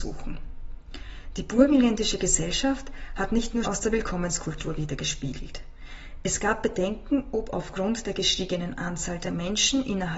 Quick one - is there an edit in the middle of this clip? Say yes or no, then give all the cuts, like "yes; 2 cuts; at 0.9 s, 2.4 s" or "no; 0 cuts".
yes; 1 cut; at 3.6 s